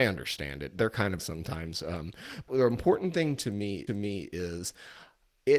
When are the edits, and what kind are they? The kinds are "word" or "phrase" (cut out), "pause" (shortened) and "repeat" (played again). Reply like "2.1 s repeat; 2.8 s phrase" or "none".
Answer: 1.2 s word; 3.9 s repeat